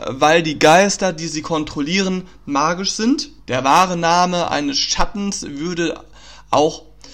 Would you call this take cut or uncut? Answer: cut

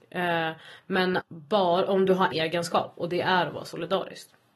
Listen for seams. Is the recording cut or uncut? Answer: cut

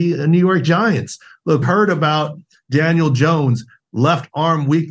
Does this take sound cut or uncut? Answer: cut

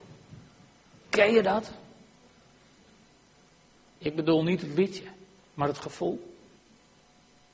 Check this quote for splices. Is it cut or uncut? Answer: uncut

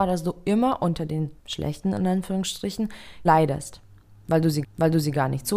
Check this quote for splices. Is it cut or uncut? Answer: cut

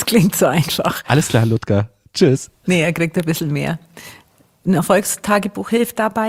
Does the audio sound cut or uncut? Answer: uncut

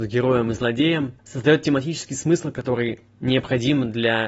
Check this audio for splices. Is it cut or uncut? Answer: cut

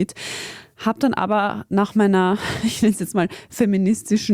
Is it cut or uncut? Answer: uncut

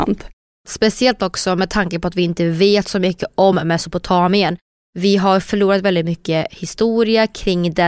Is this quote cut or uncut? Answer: uncut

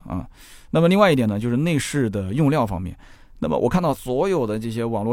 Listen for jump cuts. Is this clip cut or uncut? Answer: uncut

